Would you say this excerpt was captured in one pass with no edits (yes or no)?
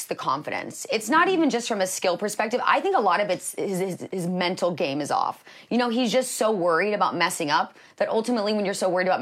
yes